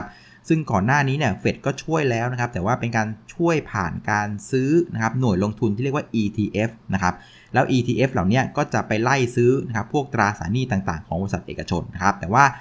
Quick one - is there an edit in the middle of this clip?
no; 0 cuts

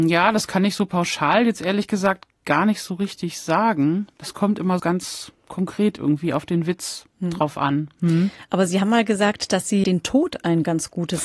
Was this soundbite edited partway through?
yes; 2 cuts; at 4.8 s, 9.8 s

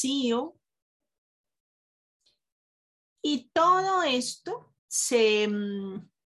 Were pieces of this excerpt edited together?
yes; 1 cut; at 4.8 s

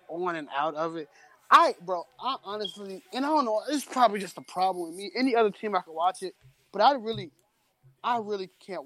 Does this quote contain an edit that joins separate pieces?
no; 0 cuts

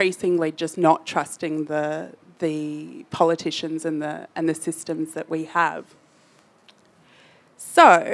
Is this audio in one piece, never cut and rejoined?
yes; 0 cuts

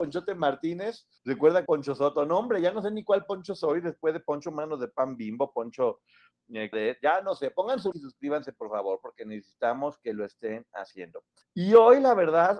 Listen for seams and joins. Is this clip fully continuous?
no; 5 cuts; at 1.2 s, 1.7 s, 6.7 s, 7.9 s, 11.4 s

